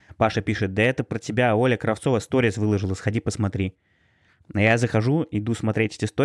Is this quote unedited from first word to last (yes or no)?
yes